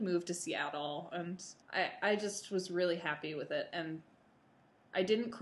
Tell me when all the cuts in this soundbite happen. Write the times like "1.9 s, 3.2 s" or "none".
1.6 s